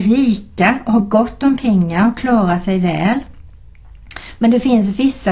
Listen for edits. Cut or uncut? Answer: uncut